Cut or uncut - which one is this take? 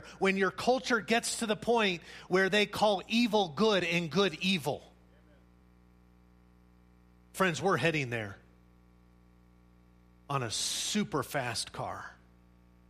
uncut